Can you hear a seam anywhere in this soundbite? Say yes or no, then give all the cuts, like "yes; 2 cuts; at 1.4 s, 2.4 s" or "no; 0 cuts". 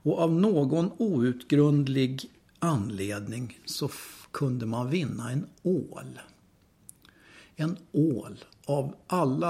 no; 0 cuts